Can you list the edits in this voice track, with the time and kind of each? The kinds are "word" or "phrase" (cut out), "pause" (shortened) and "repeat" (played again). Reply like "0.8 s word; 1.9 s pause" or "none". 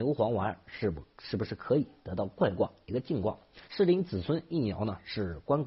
3.6 s pause